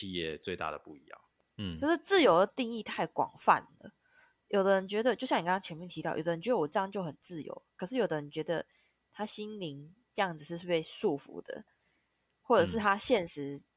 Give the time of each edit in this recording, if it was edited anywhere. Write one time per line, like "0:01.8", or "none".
none